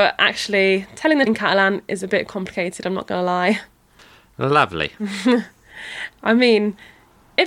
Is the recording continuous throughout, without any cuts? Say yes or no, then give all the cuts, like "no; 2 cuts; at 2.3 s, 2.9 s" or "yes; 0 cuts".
no; 1 cut; at 1.3 s